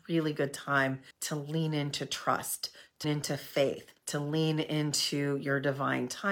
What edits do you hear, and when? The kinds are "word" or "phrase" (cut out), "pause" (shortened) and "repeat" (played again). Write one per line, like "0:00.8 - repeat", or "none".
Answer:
0:01.1 - pause
0:03.0 - word
0:04.0 - pause

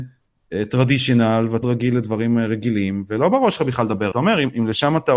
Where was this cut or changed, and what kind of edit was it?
0:01.6 - word
0:04.1 - phrase

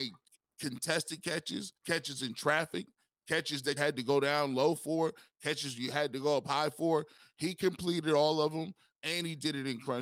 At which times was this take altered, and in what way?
0:01.8 - pause
0:03.8 - word

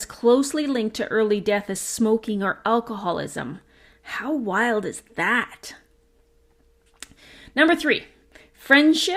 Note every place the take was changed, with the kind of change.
none

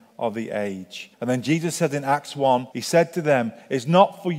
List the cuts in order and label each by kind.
0:01.1 - pause
0:02.7 - pause

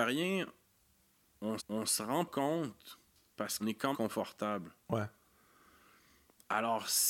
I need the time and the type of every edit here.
0:01.6 - repeat
0:02.3 - word
0:03.6 - word
0:03.9 - word

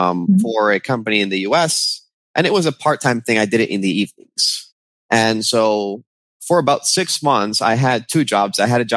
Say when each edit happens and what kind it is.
none

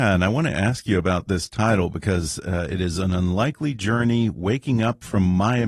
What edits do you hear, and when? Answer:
none

